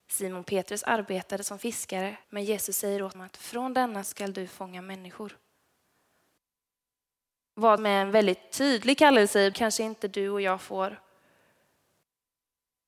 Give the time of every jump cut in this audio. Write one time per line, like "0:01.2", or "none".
0:02.2
0:03.1
0:04.0
0:07.8
0:09.5